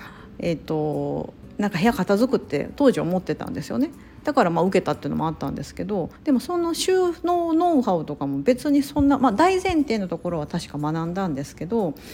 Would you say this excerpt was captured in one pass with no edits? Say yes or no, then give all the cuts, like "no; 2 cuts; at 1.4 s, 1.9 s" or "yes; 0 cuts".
no; 1 cut; at 6.2 s